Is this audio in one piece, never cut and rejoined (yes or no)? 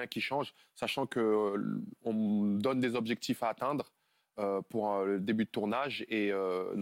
yes